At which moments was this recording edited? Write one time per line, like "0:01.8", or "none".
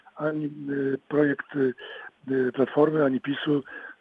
none